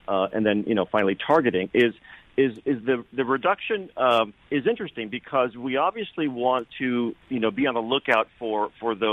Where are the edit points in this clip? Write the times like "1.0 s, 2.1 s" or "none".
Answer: 4.4 s, 7.2 s